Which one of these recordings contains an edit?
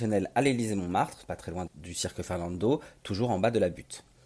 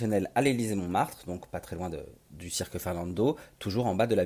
first; 2 cuts; at 1.2 s, 1.7 s

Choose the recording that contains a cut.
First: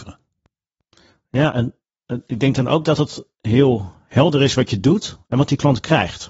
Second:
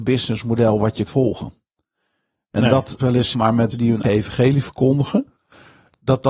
second; 5 cuts; at 1.0 s, 3.0 s, 3.3 s, 3.7 s, 4.0 s

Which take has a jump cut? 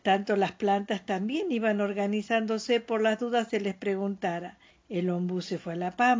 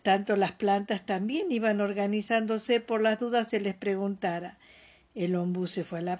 first; 1 cut; at 4.7 s

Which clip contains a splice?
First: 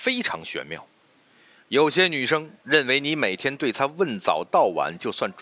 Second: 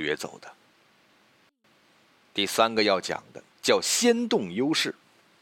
second; 1 cut; at 3.5 s

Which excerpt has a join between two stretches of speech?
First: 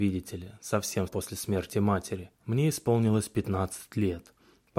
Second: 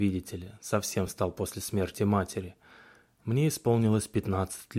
first; 2 cuts; at 1.1 s, 2.3 s

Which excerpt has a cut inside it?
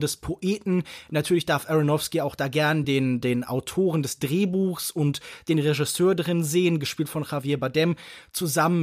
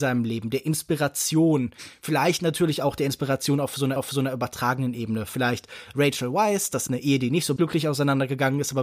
second; 3 cuts; at 4.0 s, 6.9 s, 7.6 s

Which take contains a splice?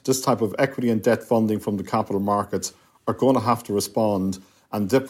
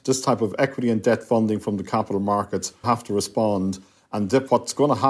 second; 1 cut; at 2.8 s

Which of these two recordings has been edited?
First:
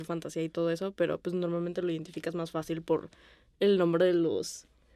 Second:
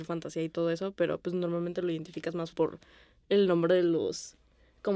second; 1 cut; at 2.5 s

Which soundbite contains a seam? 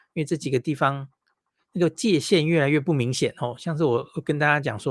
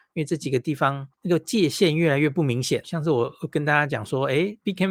second; 2 cuts; at 1.1 s, 2.8 s

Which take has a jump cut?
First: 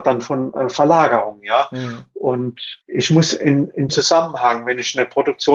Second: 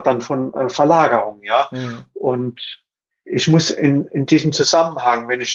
first; 2 cuts; at 2.8 s, 3.9 s

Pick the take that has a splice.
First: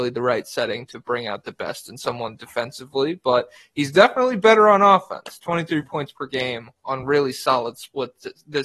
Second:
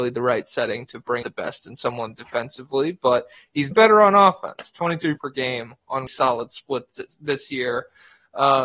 second; 4 cuts; at 1.2 s, 3.7 s, 5.2 s, 6.1 s

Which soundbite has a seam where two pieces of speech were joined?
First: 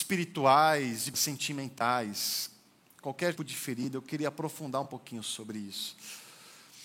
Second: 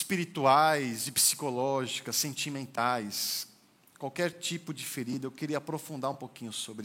first; 2 cuts; at 1.1 s, 3.4 s

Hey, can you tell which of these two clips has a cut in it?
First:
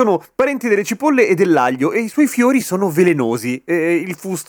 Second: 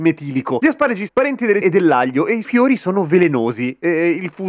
second; 3 cuts; at 1.1 s, 1.6 s, 2.4 s

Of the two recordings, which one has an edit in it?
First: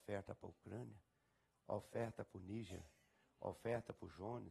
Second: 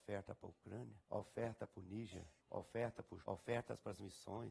second; 3 cuts; at 1.0 s, 2.4 s, 3.2 s

